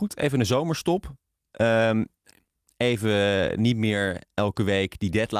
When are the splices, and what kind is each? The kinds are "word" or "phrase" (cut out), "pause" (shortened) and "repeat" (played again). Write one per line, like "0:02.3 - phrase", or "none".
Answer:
none